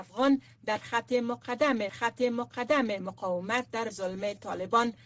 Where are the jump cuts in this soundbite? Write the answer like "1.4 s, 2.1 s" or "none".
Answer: 1.9 s, 3.9 s